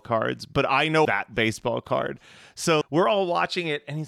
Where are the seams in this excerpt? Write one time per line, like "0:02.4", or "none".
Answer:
0:01.0
0:02.8

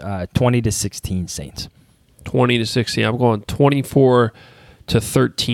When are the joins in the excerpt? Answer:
none

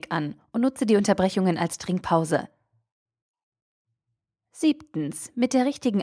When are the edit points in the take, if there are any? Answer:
none

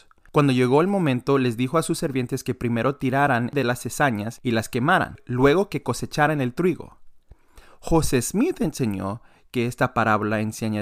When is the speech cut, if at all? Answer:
none

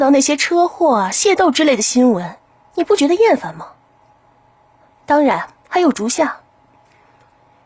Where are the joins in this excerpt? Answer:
0:01.1
0:05.6

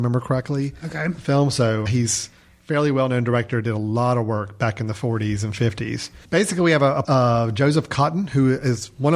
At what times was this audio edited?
0:01.9
0:06.2
0:07.0

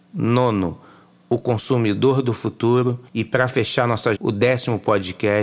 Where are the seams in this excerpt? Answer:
0:03.1
0:04.1

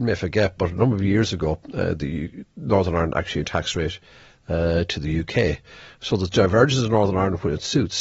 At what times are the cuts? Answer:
0:03.4

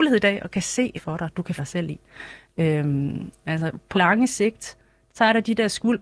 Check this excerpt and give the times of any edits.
0:01.0
0:01.6
0:03.4
0:03.9

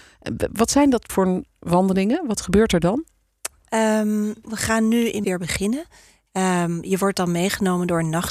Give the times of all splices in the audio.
0:01.1
0:04.4
0:05.2

